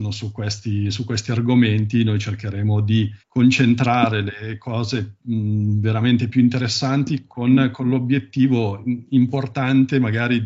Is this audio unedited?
no; 1 cut; at 3.2 s

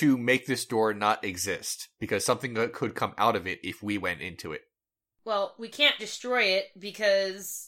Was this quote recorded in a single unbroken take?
no; 1 cut; at 6.0 s

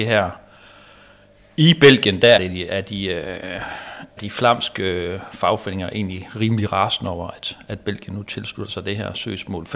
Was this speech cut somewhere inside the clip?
yes; 2 cuts; at 2.4 s, 4.2 s

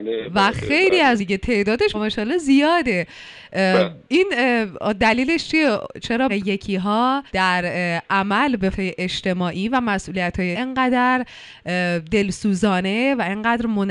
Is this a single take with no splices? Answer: no; 7 cuts; at 1.2 s, 1.9 s, 4.0 s, 6.3 s, 7.3 s, 8.7 s, 10.5 s

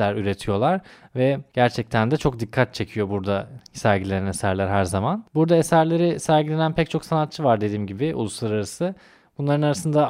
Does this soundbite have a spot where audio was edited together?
no; 0 cuts

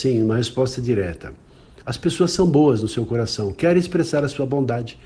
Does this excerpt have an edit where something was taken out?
no; 0 cuts

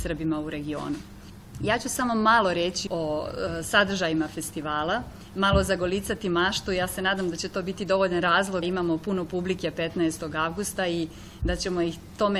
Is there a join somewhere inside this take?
yes; 2 cuts; at 2.9 s, 8.6 s

